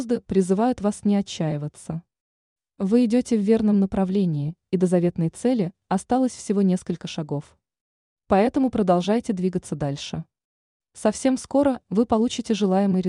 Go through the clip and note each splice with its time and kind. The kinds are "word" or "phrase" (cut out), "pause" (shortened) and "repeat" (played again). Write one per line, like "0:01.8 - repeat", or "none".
none